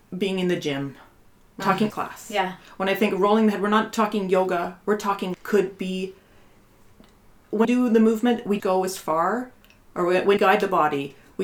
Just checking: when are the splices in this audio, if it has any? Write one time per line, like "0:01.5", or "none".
0:01.6
0:01.9
0:05.3
0:07.6
0:08.6
0:10.4

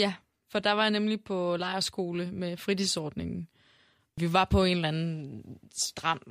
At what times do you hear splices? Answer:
none

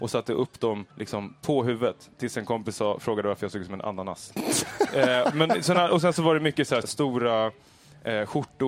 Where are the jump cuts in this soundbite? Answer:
0:00.9
0:06.8

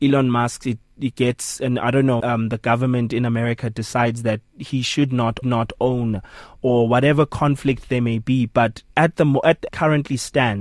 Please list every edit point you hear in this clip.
0:02.2
0:05.4
0:09.7

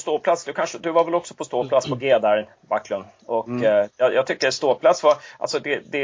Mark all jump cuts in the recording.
0:02.6

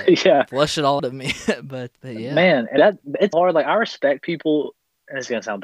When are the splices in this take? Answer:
0:01.0
0:02.0
0:02.8
0:03.3

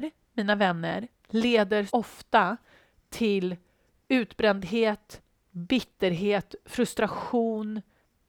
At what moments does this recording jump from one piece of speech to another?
0:01.9

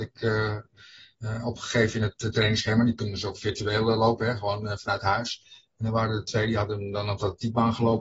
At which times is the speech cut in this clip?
none

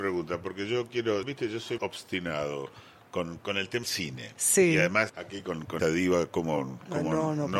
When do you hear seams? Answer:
0:01.2
0:01.8
0:03.4
0:03.8
0:05.1
0:05.8

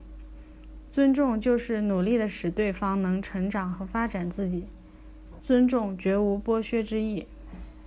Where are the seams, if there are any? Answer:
0:05.4

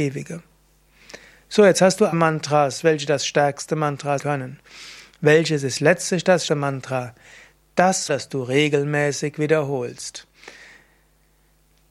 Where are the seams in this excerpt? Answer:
0:02.1
0:04.2
0:06.5
0:08.1

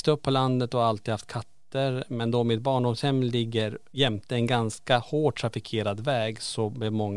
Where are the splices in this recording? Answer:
none

